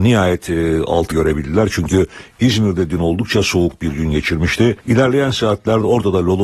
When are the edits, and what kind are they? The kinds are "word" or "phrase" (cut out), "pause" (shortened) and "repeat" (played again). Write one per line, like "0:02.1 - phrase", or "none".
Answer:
0:01.1 - word
0:04.8 - pause